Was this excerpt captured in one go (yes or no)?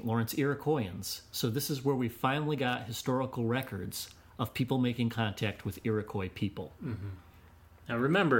yes